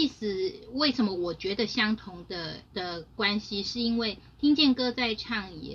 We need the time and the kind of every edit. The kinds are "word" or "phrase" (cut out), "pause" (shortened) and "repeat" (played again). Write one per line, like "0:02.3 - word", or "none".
0:02.6 - pause